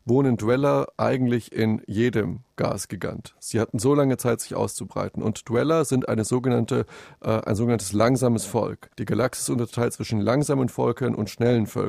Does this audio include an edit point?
yes; 1 cut; at 8.9 s

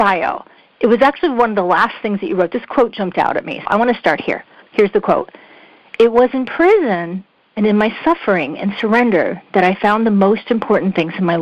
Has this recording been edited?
yes; 1 cut; at 3.7 s

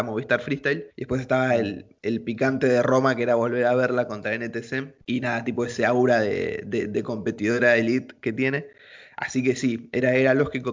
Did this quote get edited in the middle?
yes; 3 cuts; at 0.9 s, 2.0 s, 5.0 s

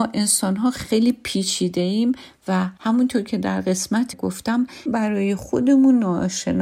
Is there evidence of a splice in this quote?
yes; 3 cuts; at 2.8 s, 4.1 s, 4.9 s

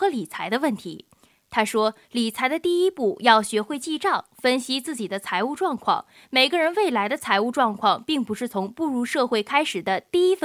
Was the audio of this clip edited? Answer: no; 0 cuts

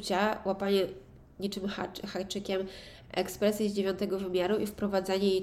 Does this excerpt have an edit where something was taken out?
no; 0 cuts

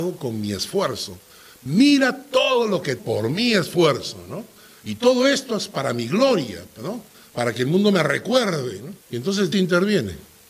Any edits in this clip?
yes; 3 cuts; at 3.0 s, 9.0 s, 9.5 s

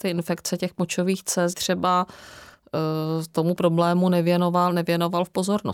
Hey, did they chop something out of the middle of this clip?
yes; 2 cuts; at 1.5 s, 3.5 s

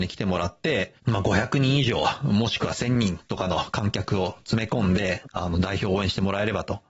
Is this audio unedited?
no; 1 cut; at 1.0 s

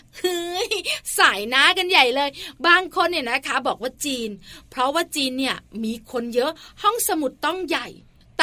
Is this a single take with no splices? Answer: yes; 0 cuts

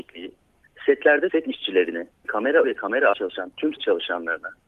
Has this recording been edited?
yes; 5 cuts; at 1.3 s, 2.2 s, 2.6 s, 3.1 s, 3.8 s

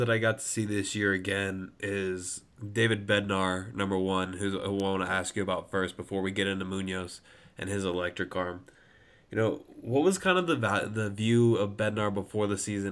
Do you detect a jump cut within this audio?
no; 0 cuts

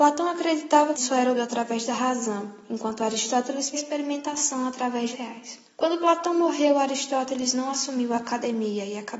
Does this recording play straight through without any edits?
no; 5 cuts; at 0.9 s, 1.3 s, 3.7 s, 5.1 s, 5.7 s

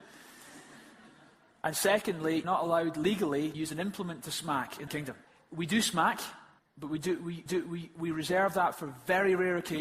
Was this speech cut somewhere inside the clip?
yes; 6 cuts; at 2.4 s, 3.5 s, 4.9 s, 5.3 s, 6.6 s, 7.5 s

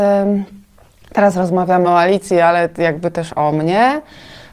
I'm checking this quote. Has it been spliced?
no; 0 cuts

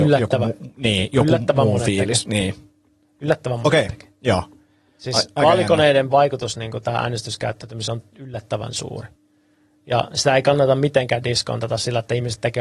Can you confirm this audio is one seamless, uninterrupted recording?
yes; 0 cuts

